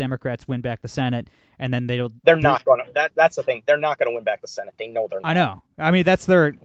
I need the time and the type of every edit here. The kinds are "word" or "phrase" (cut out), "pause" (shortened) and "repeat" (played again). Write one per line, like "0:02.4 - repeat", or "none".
none

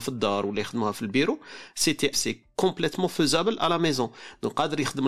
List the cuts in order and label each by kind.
0:02.1 - word

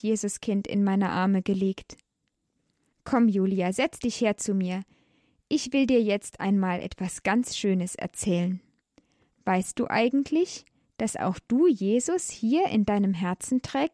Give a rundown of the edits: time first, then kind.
none

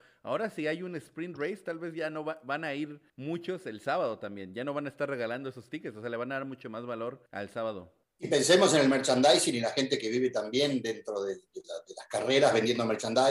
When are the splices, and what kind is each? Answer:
0:03.1 - pause
0:07.3 - pause
0:08.0 - pause

